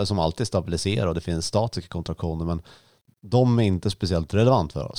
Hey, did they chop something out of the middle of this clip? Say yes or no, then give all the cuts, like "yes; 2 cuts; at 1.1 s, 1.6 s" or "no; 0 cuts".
no; 0 cuts